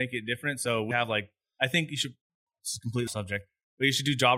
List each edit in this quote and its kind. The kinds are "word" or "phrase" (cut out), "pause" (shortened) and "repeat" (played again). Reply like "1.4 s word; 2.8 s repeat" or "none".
0.9 s word; 3.1 s word

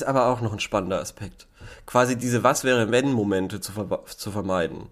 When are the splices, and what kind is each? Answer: none

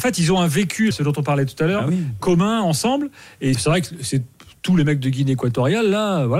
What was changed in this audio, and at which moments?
0.9 s word; 3.5 s word

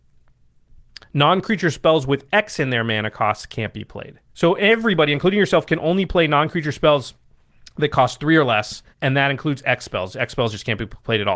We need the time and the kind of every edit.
4.3 s pause; 8.9 s pause

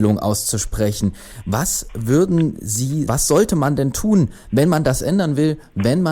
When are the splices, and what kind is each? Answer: 3.1 s word

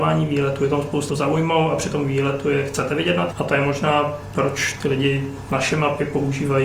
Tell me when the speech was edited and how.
1.1 s phrase; 3.3 s word

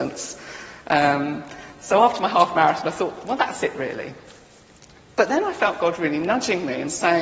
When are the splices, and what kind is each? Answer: none

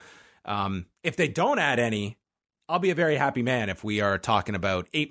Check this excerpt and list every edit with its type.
1.0 s pause

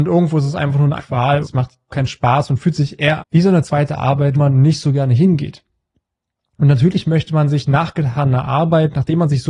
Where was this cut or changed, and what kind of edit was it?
1.0 s word; 1.4 s word; 1.9 s word; 3.2 s word; 4.3 s word

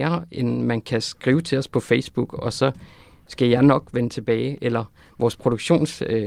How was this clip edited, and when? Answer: none

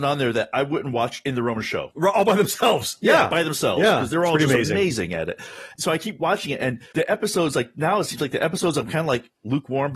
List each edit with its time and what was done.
6.9 s pause

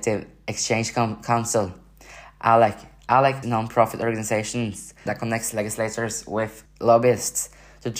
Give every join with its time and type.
3.4 s word; 5.1 s word; 6.7 s word

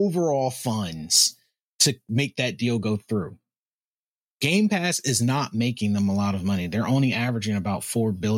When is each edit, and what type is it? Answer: none

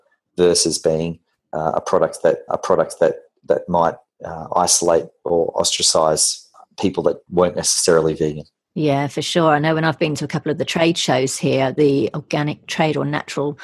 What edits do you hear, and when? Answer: 1.3 s pause; 2.5 s repeat

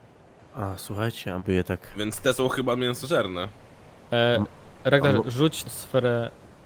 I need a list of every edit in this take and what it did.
1.4 s word; 5.6 s word

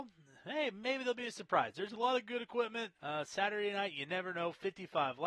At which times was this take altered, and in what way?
3.0 s pause

